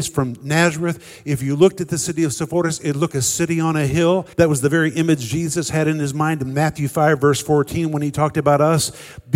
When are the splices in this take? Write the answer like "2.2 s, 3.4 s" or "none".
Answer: 3.1 s, 4.3 s